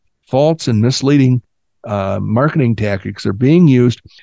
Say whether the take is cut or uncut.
uncut